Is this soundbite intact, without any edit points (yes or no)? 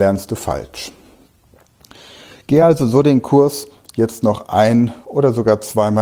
yes